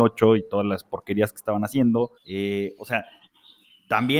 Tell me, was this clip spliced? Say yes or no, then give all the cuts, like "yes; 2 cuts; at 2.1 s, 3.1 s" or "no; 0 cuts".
yes; 1 cut; at 2.2 s